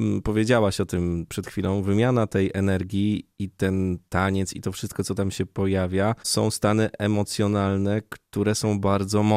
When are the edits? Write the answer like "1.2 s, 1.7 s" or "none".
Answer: 1.3 s, 6.2 s

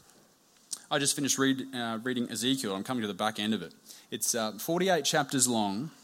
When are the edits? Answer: none

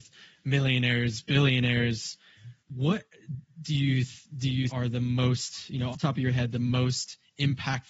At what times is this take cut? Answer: 2.6 s, 4.7 s, 5.9 s

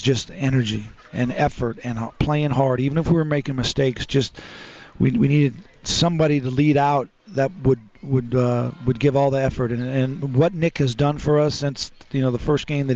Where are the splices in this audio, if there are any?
none

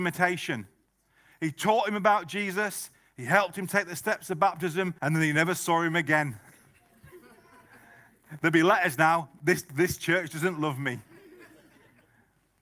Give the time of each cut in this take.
5.0 s

